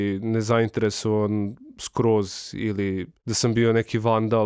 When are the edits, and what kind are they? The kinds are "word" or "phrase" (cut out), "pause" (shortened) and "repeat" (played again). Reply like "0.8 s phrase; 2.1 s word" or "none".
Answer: none